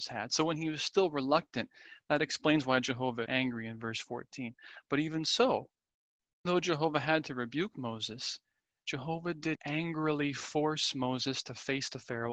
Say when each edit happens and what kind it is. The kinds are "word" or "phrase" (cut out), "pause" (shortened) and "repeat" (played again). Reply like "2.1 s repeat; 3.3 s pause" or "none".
3.3 s word; 6.5 s word; 9.6 s word